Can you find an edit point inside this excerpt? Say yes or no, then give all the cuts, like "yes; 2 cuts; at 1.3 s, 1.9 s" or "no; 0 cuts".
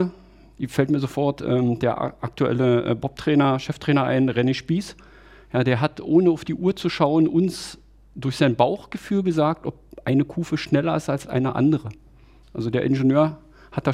no; 0 cuts